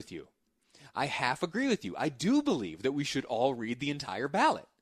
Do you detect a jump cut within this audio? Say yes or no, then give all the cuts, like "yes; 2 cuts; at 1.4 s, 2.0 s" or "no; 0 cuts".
no; 0 cuts